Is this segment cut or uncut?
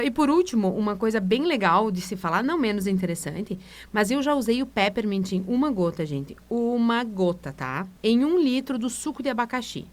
cut